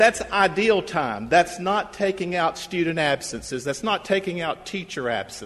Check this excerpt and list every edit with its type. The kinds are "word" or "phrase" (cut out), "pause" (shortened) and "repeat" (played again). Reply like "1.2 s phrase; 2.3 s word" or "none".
none